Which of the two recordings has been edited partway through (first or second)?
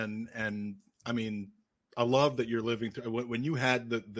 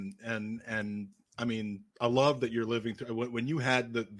second